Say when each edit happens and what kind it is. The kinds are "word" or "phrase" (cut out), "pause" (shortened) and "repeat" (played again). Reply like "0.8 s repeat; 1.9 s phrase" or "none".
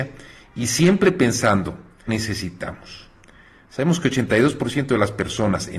2.1 s phrase